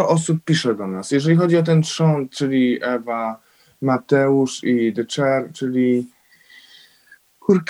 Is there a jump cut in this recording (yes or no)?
no